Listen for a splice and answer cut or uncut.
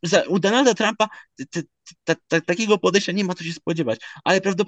uncut